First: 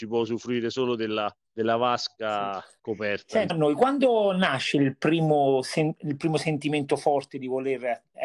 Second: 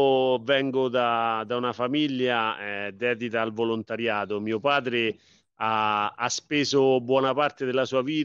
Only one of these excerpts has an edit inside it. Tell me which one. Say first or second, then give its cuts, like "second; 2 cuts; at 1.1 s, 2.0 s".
first; 3 cuts; at 1.4 s, 2.8 s, 3.5 s